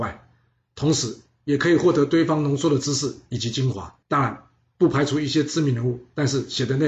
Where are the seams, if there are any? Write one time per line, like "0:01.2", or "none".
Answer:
0:04.0